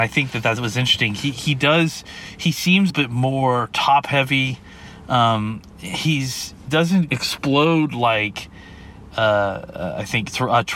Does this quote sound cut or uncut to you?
cut